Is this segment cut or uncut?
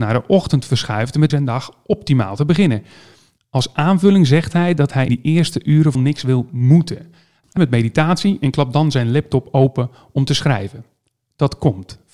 cut